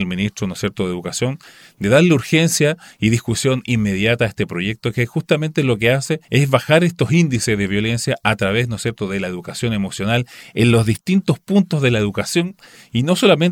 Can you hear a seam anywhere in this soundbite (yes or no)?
yes